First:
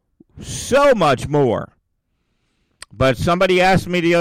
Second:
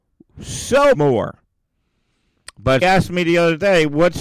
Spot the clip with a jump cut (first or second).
second